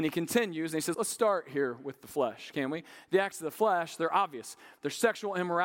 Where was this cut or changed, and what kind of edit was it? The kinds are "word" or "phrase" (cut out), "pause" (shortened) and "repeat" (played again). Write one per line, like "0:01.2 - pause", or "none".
0:00.9 - word

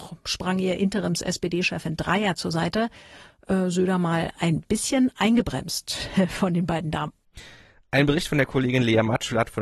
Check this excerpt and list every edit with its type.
none

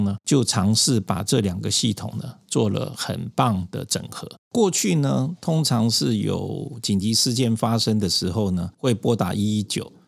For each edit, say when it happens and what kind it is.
0:08.7 - pause

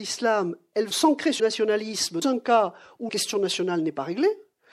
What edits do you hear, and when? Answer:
0:00.9 - word
0:01.4 - word
0:02.2 - word
0:03.1 - word

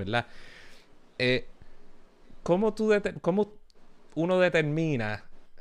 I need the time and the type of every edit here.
0:02.4 - word

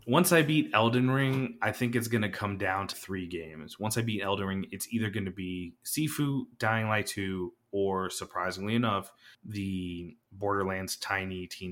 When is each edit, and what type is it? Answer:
0:02.9 - word
0:09.3 - pause

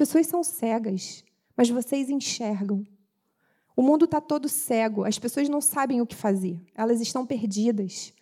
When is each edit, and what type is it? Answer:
none

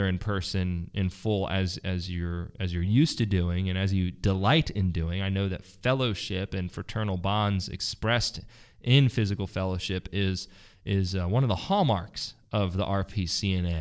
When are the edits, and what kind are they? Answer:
none

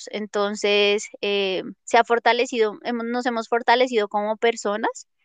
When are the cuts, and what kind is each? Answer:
0:01.8 - pause

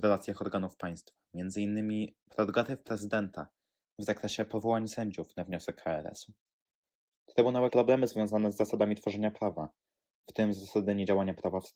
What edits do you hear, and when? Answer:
0:07.7 - phrase

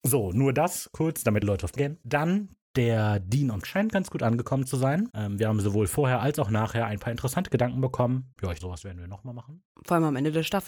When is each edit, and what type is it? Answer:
0:01.4 - word
0:01.8 - word
0:03.6 - word
0:08.6 - word

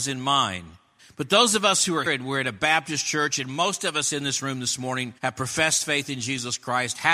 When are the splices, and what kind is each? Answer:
0:01.0 - pause
0:02.1 - word
0:05.2 - pause

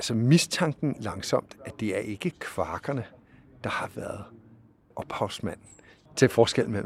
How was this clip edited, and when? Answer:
0:01.0 - word

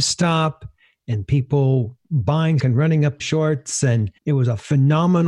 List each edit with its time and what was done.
0:02.6 - word
0:03.2 - phrase
0:04.2 - pause

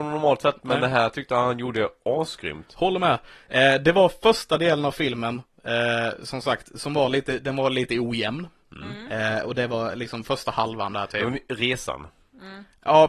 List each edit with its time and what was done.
none

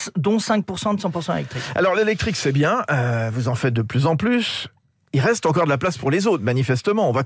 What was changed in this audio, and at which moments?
none

